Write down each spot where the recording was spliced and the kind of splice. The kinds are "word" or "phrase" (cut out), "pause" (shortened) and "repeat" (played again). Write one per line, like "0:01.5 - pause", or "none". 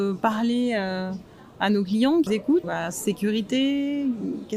0:02.3 - word
0:02.6 - word